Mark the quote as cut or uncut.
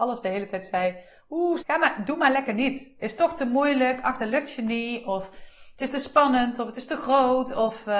cut